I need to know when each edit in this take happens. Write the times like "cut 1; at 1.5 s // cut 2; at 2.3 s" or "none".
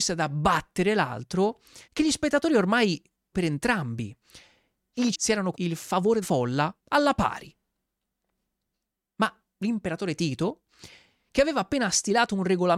cut 1; at 1.8 s // cut 2; at 3.3 s // cut 3; at 5.1 s // cut 4; at 5.5 s // cut 5; at 6.2 s // cut 6; at 6.8 s // cut 7; at 9.5 s

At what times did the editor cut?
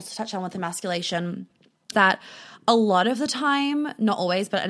cut 1; at 1.9 s

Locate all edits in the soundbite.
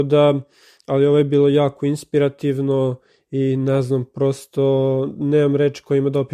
none

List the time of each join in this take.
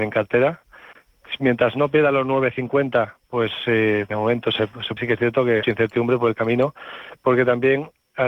cut 1; at 3.2 s // cut 2; at 5.0 s // cut 3; at 5.6 s

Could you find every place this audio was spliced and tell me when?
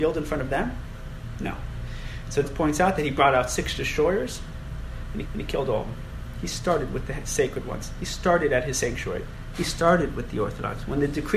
cut 1; at 2.4 s // cut 2; at 5.3 s

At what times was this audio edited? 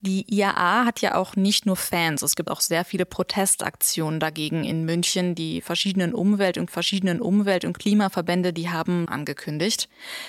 cut 1; at 2.5 s // cut 2; at 6.7 s // cut 3; at 9.1 s

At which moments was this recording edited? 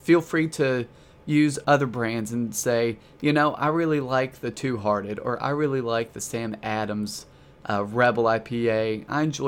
none

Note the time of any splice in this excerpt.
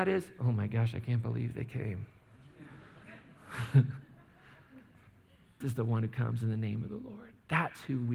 cut 1; at 5.6 s

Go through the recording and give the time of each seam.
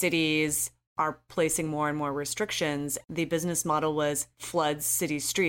none

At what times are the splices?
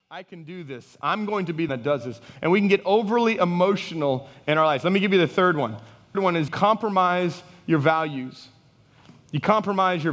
cut 1; at 1.7 s // cut 2; at 6.1 s // cut 3; at 6.5 s

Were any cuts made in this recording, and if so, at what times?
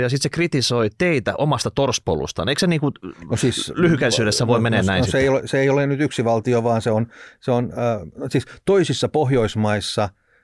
none

